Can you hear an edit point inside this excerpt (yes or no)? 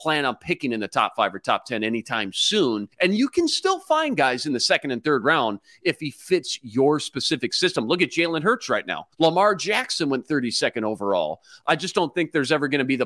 yes